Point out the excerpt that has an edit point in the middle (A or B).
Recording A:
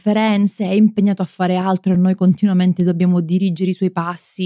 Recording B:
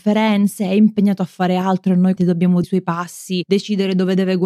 B